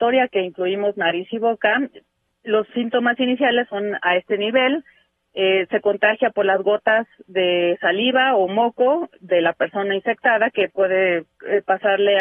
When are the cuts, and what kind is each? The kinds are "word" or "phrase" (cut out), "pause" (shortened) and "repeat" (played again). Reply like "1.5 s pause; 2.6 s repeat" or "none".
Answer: none

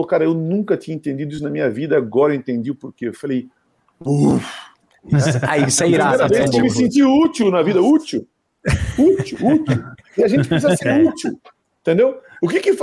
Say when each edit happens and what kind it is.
none

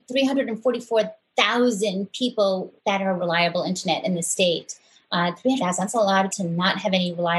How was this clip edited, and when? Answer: 2.8 s pause; 3.2 s word; 5.6 s phrase; 6.3 s word

